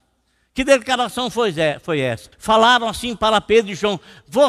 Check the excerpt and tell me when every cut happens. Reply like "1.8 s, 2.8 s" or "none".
2.3 s